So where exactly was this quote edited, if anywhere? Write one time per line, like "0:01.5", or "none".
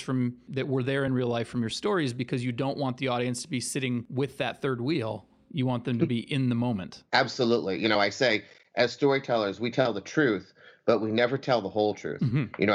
none